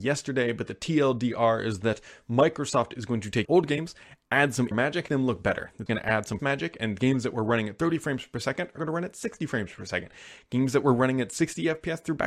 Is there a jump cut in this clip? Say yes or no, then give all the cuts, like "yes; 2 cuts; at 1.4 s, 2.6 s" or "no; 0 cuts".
yes; 6 cuts; at 3.4 s, 4.7 s, 5.1 s, 5.9 s, 6.4 s, 8.8 s